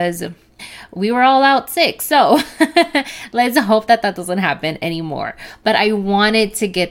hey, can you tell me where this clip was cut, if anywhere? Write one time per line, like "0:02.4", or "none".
none